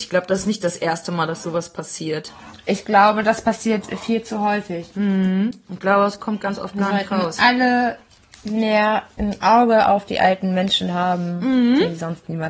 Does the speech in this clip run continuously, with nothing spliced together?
yes; 0 cuts

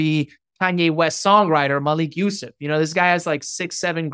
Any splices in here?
no; 0 cuts

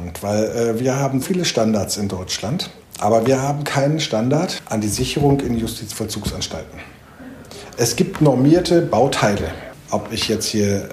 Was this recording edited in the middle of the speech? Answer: yes; 1 cut; at 1.2 s

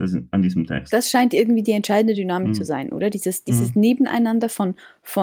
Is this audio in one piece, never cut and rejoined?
yes; 0 cuts

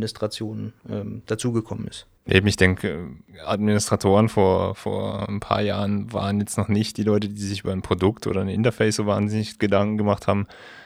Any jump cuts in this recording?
yes; 1 cut; at 2.2 s

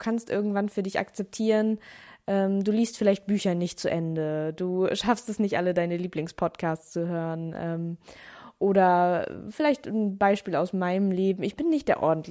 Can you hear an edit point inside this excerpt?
no; 0 cuts

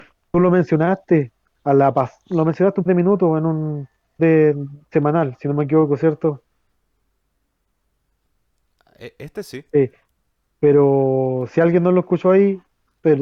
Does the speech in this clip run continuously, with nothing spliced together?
no; 3 cuts; at 2.9 s, 4.2 s, 9.7 s

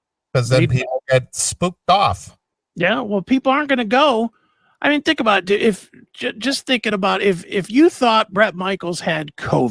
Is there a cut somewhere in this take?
no; 0 cuts

